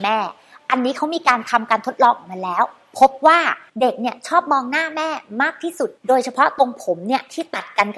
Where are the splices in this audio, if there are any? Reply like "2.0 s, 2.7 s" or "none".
3.7 s, 6.0 s